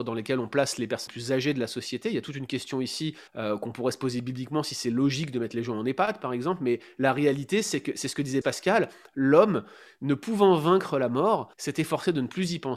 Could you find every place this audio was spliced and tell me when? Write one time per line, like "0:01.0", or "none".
0:01.1
0:03.3
0:08.4
0:11.5